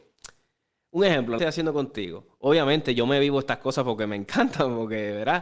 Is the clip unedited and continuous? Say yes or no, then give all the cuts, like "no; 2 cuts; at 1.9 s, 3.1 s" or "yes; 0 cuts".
no; 1 cut; at 1.4 s